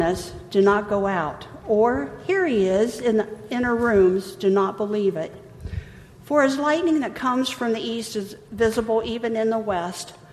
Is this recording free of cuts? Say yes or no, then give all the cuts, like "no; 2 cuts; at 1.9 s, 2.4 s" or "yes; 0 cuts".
yes; 0 cuts